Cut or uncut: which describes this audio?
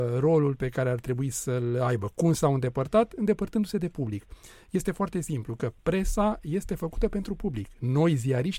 uncut